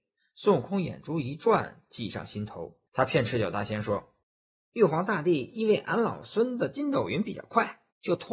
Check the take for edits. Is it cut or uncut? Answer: cut